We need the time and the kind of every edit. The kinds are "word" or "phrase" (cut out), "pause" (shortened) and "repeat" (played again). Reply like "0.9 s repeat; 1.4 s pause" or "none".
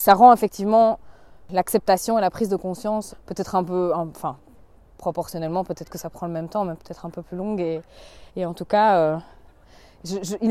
3.1 s word; 8.3 s pause